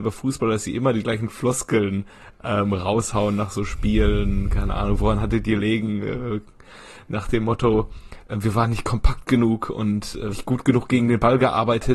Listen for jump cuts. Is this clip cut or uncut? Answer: cut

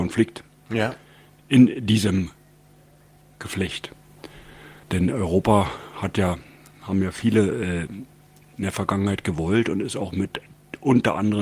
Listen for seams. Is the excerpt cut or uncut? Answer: cut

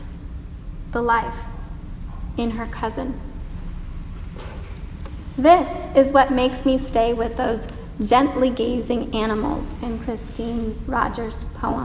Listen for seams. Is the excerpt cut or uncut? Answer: uncut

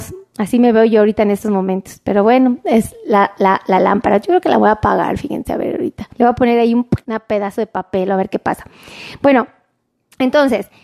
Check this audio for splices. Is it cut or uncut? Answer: cut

